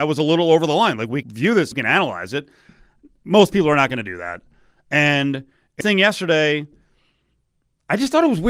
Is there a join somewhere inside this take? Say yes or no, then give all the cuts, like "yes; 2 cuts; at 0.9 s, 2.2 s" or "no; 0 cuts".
yes; 3 cuts; at 1.2 s, 1.7 s, 5.8 s